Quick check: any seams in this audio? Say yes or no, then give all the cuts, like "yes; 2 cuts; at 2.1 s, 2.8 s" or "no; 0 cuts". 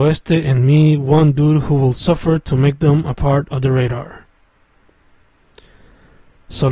no; 0 cuts